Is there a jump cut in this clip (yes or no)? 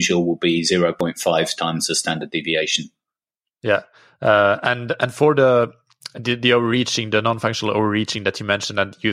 no